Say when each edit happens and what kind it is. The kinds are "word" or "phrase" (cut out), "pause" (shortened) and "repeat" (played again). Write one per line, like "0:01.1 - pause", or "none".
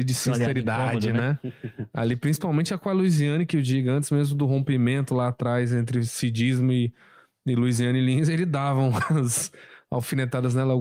none

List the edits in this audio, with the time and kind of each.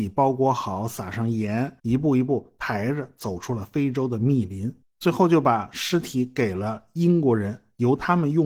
0:01.8 - pause
0:04.8 - pause

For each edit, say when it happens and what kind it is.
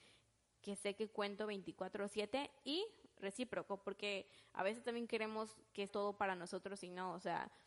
0:05.9 - word

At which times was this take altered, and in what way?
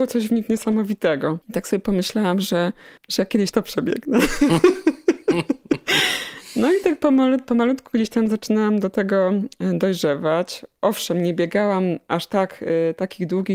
0:01.4 - pause
0:03.0 - pause
0:03.5 - word

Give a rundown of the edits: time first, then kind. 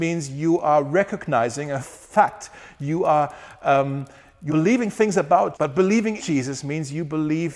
0:01.8 - word
0:04.5 - word
0:05.5 - word
0:06.2 - word

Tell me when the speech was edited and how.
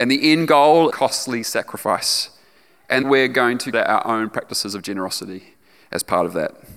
0:00.9 - phrase
0:03.0 - word
0:03.7 - word

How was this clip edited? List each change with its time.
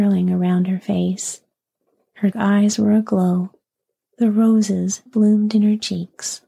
0:02.3 - word
0:05.1 - word

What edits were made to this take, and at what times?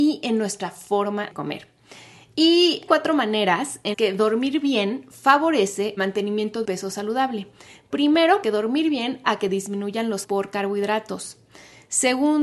0:01.3 - word
0:02.9 - word
0:03.9 - word
0:06.0 - word
0:06.6 - word
0:08.4 - word
0:09.2 - word
0:10.2 - word

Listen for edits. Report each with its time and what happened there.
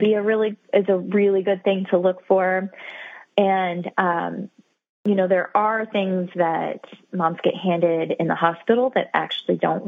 none

